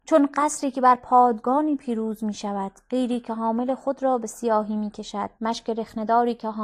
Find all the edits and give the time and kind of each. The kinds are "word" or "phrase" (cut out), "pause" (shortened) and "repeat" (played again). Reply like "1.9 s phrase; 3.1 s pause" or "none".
5.4 s pause